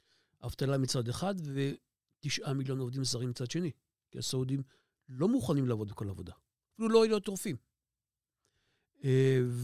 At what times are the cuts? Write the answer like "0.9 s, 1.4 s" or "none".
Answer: none